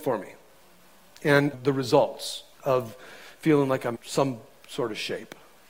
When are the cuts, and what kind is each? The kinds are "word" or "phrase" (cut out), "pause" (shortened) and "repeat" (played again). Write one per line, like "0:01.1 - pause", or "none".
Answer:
0:01.5 - phrase
0:02.5 - pause
0:03.9 - word